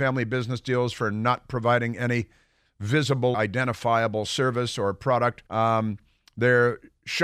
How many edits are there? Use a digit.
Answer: 2